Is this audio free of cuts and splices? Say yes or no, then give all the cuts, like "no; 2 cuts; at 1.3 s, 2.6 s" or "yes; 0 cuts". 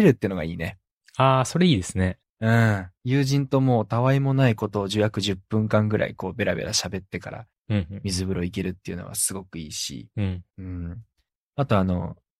no; 2 cuts; at 2.9 s, 10.5 s